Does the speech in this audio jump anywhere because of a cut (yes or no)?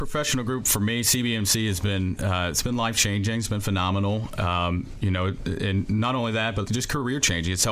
no